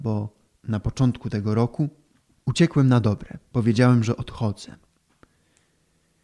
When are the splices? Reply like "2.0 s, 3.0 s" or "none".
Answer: 2.1 s